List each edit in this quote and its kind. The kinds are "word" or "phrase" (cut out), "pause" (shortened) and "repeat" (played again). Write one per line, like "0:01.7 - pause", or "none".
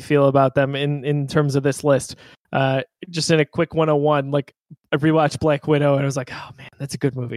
none